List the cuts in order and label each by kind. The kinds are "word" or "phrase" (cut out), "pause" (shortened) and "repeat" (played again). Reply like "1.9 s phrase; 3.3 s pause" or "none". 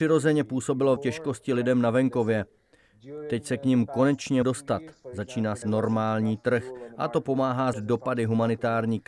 1.0 s word; 4.4 s word; 5.6 s word; 7.7 s word